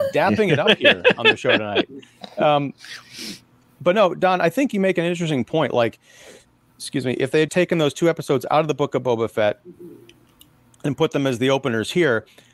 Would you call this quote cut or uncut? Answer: cut